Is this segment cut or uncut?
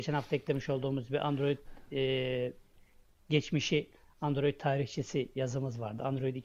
uncut